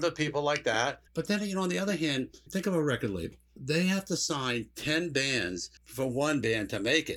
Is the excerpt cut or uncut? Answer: cut